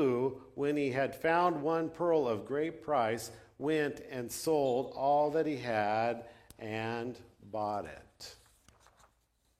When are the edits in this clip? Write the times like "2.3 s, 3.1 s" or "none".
none